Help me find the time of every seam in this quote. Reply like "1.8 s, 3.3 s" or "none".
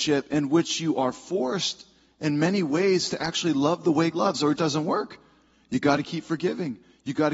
4.1 s, 4.6 s